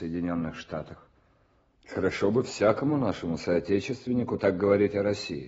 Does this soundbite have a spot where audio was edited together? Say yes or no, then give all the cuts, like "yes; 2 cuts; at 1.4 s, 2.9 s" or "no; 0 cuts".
no; 0 cuts